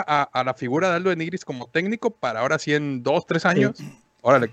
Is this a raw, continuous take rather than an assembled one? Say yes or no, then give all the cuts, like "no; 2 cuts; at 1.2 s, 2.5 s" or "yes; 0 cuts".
yes; 0 cuts